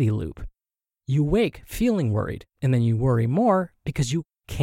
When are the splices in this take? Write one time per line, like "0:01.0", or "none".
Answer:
0:02.5

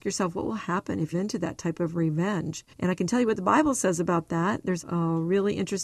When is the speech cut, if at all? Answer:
0:01.1
0:02.7
0:04.8

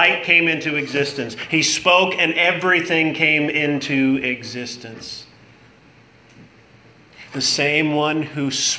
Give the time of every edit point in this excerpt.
none

